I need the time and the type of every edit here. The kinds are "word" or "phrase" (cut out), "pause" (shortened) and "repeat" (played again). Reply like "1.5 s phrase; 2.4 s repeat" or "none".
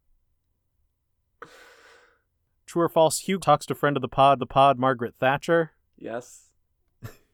2.7 s word; 3.4 s word; 4.4 s repeat; 5.9 s pause